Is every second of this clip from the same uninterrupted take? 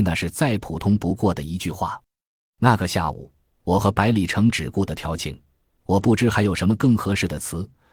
yes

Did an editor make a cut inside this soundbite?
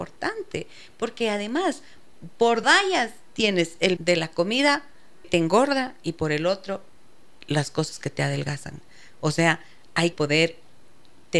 yes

